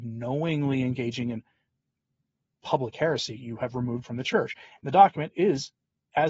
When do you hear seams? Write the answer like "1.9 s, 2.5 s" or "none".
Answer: 4.0 s